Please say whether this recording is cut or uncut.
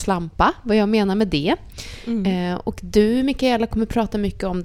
uncut